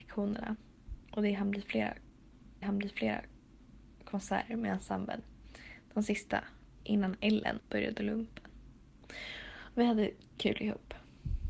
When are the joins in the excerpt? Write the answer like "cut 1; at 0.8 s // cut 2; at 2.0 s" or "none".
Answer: cut 1; at 2.6 s // cut 2; at 6.8 s // cut 3; at 7.6 s

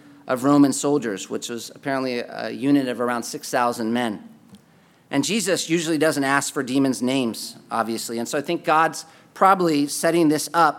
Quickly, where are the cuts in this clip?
none

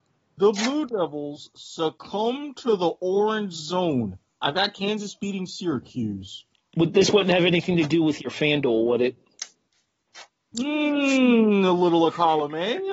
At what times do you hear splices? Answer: cut 1; at 6.5 s

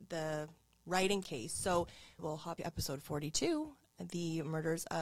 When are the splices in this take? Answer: cut 1; at 1.2 s // cut 2; at 2.2 s // cut 3; at 2.6 s

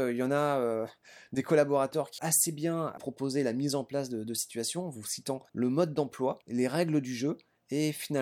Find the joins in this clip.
cut 1; at 2.2 s // cut 2; at 3.0 s // cut 3; at 5.5 s // cut 4; at 6.4 s

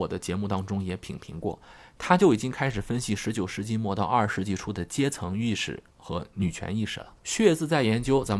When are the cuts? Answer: cut 1; at 7.2 s

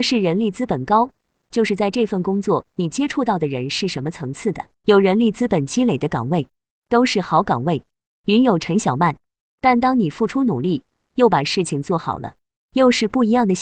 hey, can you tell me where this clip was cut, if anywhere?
cut 1; at 4.7 s

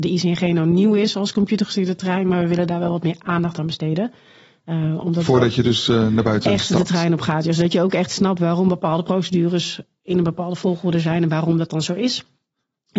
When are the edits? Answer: none

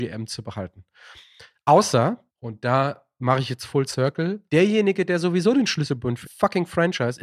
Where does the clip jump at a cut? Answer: cut 1; at 2.3 s // cut 2; at 4.5 s // cut 3; at 6.2 s

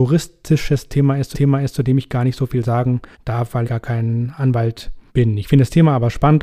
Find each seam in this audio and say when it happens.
cut 1; at 1.3 s // cut 2; at 3.1 s // cut 3; at 3.6 s // cut 4; at 5.1 s

